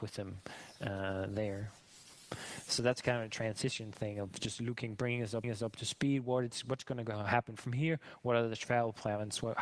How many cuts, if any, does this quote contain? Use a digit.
1